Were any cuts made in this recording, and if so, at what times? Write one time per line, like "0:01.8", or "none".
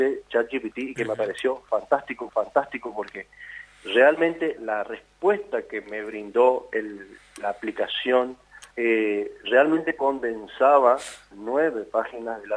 0:02.3
0:04.6
0:08.7
0:11.3